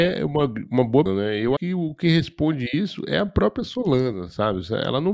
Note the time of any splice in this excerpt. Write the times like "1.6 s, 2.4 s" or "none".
1.1 s, 1.6 s